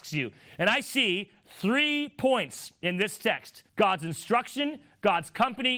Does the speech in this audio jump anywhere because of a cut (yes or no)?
yes